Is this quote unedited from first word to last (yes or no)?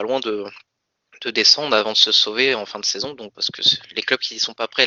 no